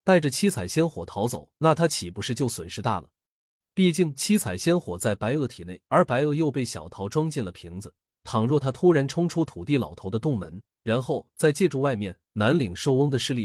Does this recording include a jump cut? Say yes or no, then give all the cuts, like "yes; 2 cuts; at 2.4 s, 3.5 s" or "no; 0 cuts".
yes; 5 cuts; at 1.6 s, 3.5 s, 5.9 s, 8.1 s, 10.7 s